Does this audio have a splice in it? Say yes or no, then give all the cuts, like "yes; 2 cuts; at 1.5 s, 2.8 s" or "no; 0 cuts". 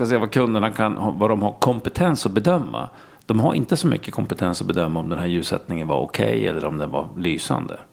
no; 0 cuts